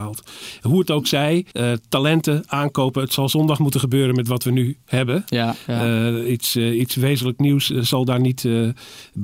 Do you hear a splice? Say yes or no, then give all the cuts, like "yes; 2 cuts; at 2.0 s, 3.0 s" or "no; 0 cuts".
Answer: yes; 1 cut; at 1.5 s